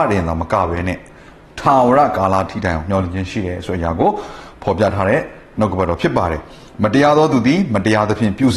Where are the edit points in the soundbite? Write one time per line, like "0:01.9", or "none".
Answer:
none